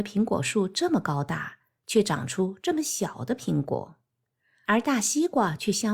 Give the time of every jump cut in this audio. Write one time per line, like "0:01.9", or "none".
none